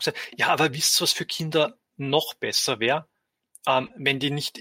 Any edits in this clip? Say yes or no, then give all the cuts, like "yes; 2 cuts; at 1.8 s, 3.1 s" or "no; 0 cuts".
no; 0 cuts